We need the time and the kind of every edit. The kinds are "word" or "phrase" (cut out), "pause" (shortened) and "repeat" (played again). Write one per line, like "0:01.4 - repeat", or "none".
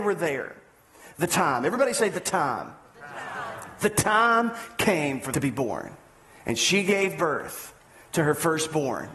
0:05.3 - phrase